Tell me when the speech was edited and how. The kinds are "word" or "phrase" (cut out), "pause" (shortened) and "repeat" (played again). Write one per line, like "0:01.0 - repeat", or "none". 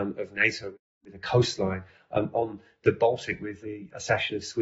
none